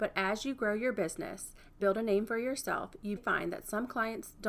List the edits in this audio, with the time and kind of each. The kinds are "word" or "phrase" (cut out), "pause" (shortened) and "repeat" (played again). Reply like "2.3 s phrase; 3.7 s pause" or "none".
1.8 s word; 3.2 s word